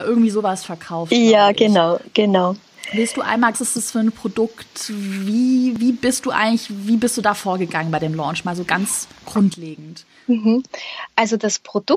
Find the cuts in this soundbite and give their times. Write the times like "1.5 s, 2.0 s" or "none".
3.5 s

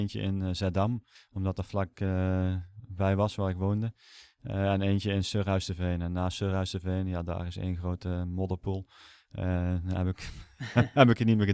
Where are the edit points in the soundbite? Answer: 1.1 s

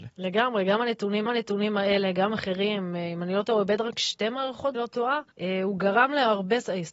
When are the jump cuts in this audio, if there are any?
1.3 s, 2.3 s, 4.7 s, 5.3 s

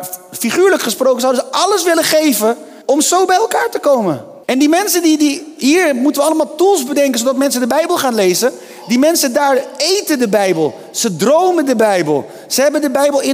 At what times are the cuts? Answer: 2.8 s, 4.4 s

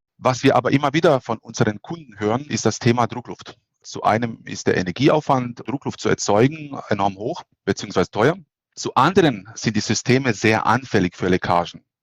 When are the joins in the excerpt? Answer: 5.7 s

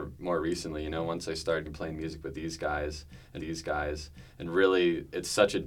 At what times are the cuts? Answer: 1.7 s, 3.4 s

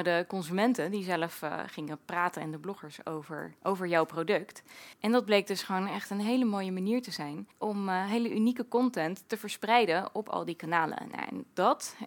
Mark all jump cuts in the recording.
3.6 s, 4.9 s, 7.5 s

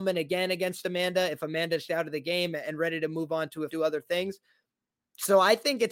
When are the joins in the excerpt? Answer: 1.9 s, 3.7 s

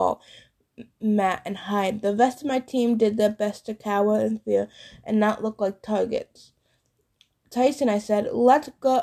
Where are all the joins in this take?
none

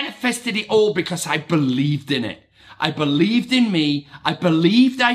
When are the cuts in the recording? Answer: none

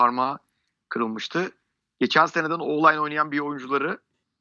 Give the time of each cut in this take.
none

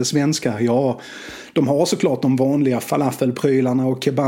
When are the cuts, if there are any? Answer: none

